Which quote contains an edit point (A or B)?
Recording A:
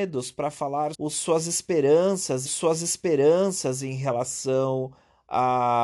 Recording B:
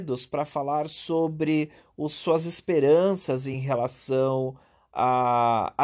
A